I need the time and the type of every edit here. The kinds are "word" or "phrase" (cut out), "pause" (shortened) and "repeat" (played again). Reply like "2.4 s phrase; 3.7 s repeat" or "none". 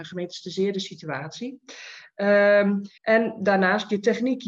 3.0 s pause